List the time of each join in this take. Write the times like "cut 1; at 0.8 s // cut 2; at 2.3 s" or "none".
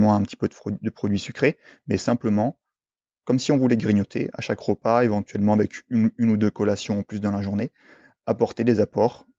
none